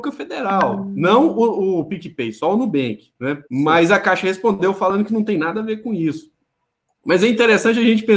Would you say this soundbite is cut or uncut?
cut